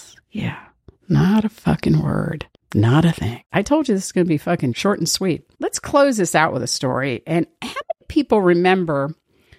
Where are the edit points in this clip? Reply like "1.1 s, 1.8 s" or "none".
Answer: 2.6 s, 3.5 s, 5.5 s